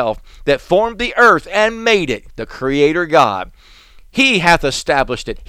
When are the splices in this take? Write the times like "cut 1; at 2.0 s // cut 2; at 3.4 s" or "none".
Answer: none